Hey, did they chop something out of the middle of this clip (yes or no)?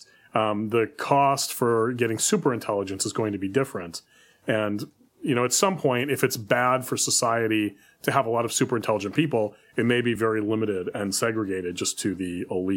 no